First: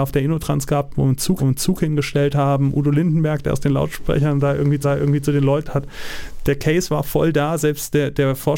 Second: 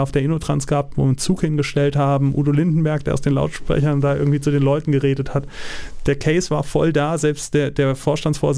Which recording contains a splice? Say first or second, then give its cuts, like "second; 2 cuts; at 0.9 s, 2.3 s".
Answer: first; 3 cuts; at 1.4 s, 4.8 s, 5.7 s